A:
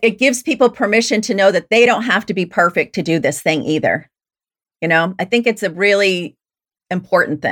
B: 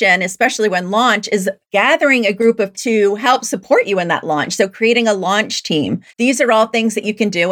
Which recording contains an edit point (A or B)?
B